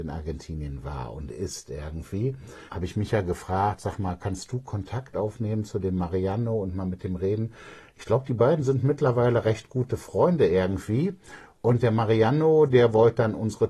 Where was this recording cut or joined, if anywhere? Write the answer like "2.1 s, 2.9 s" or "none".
2.7 s